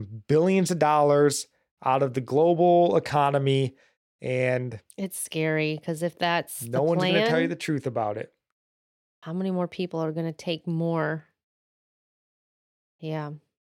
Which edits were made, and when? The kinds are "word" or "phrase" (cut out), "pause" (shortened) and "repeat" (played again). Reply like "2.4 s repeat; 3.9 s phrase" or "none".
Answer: none

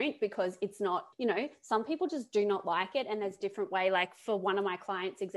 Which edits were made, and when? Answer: 1.1 s pause

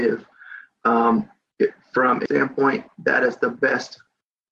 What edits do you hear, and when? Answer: 2.3 s word

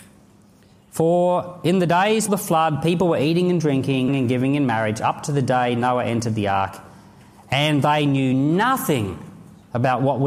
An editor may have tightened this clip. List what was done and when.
2.3 s word; 4.1 s word

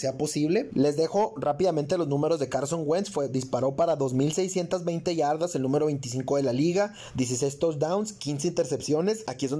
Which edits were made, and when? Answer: none

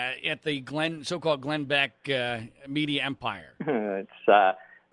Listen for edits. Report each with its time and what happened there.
3.6 s pause

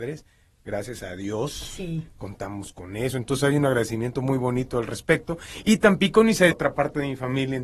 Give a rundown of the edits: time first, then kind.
6.5 s phrase

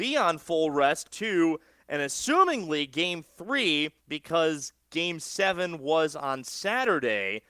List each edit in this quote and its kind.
1.1 s phrase; 4.0 s pause

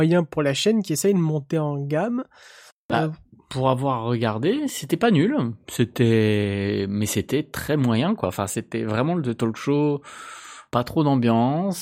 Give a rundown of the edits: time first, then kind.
none

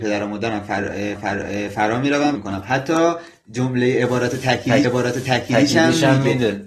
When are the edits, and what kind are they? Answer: 1.2 s repeat; 2.4 s phrase; 4.8 s repeat

